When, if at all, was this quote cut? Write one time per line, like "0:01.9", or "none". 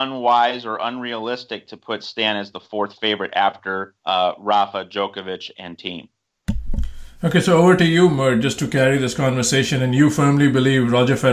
0:04.0

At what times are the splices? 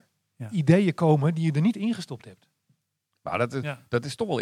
none

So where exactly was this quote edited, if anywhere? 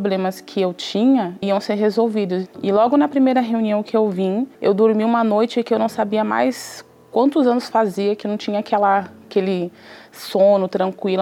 0:01.4
0:04.5
0:08.2

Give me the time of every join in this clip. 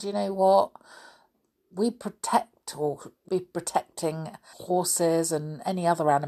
0:03.3
0:04.5

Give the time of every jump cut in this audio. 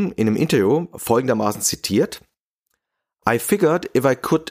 none

